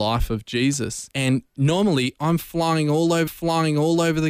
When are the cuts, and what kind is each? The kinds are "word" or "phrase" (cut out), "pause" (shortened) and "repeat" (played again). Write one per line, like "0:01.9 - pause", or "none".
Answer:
0:01.1 - pause
0:03.3 - repeat